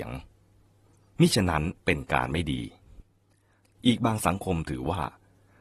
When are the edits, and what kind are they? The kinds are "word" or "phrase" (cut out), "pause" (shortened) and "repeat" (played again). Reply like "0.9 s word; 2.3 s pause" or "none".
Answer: 1.8 s pause